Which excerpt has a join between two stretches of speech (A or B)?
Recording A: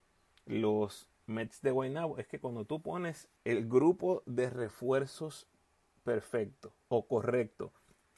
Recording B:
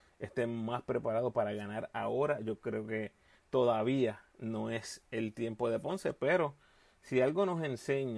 A